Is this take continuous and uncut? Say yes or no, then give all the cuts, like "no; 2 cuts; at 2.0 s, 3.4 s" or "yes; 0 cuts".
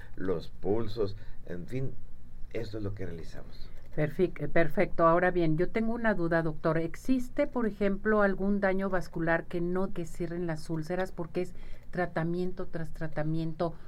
no; 1 cut; at 9.9 s